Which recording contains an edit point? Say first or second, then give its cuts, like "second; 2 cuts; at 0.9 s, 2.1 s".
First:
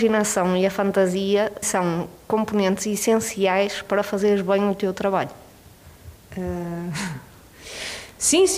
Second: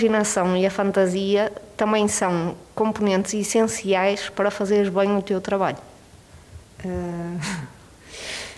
first; 1 cut; at 1.6 s